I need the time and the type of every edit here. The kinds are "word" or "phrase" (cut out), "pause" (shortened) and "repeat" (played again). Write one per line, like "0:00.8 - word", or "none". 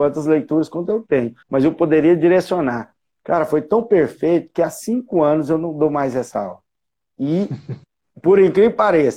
0:01.4 - pause